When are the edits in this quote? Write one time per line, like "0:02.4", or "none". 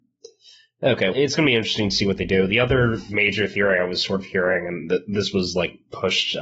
0:01.1